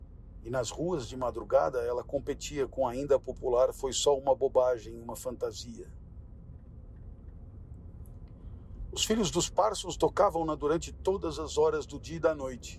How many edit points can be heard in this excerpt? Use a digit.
0